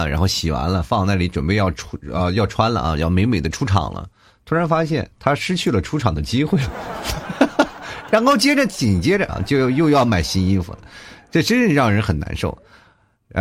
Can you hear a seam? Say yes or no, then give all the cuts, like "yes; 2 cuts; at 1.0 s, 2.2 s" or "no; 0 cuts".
no; 0 cuts